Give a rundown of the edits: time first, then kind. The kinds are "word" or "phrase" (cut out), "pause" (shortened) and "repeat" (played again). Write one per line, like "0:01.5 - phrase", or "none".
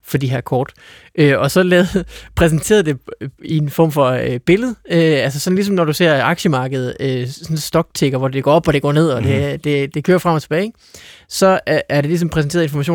none